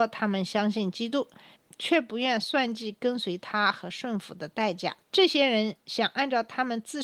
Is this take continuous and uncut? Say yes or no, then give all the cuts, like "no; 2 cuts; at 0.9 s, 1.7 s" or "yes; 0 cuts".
no; 2 cuts; at 5.0 s, 5.8 s